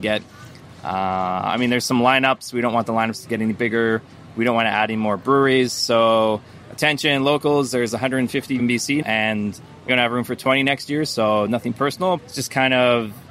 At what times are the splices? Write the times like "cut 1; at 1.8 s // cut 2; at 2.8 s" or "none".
cut 1; at 8.6 s // cut 2; at 9.0 s // cut 3; at 9.9 s // cut 4; at 12.2 s